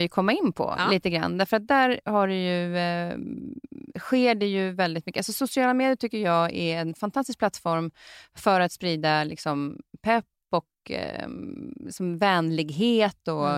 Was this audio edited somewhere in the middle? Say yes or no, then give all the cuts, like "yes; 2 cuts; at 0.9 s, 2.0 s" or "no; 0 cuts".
no; 0 cuts